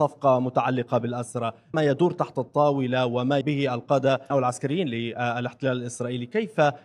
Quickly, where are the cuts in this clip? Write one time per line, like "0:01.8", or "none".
0:01.7
0:03.4
0:04.3